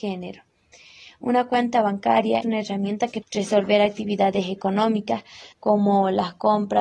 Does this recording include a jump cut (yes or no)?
yes